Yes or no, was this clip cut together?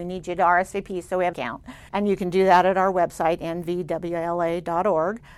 yes